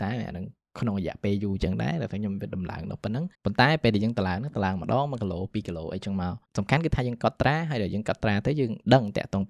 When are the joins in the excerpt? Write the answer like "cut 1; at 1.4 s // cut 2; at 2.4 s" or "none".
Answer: cut 1; at 3.3 s // cut 2; at 6.5 s

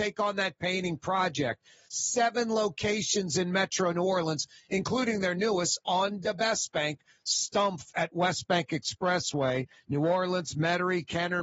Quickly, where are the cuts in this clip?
none

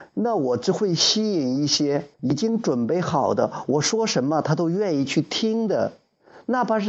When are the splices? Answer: cut 1; at 2.1 s

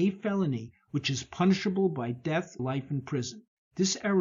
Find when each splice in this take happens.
cut 1; at 2.6 s

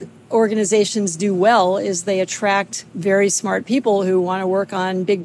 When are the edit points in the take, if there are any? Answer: cut 1; at 2.9 s

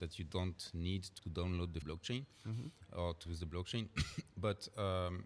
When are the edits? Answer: cut 1; at 1.2 s // cut 2; at 1.8 s // cut 3; at 3.3 s

